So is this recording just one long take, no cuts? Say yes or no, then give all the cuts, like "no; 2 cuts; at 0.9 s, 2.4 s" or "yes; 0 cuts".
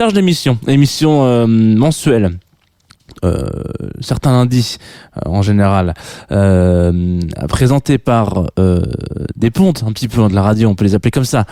yes; 0 cuts